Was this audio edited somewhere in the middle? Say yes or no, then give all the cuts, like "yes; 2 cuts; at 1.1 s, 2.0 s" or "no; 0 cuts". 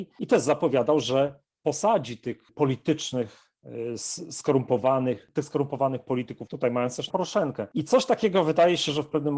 yes; 2 cuts; at 6.5 s, 7.1 s